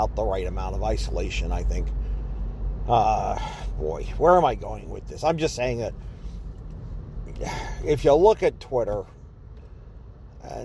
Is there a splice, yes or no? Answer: no